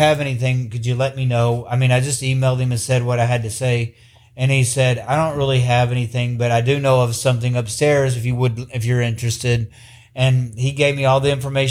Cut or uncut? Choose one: uncut